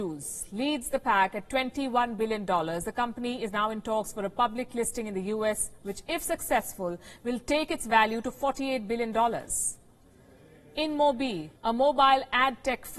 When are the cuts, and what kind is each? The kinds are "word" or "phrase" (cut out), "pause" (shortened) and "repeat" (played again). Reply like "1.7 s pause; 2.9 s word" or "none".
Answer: 11.6 s pause